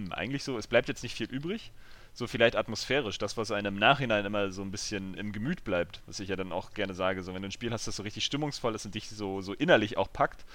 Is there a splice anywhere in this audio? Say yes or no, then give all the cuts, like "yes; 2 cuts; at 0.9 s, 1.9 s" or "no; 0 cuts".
yes; 1 cut; at 5.1 s